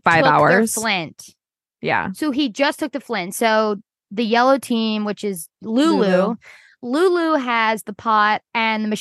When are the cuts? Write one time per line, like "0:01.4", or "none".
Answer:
none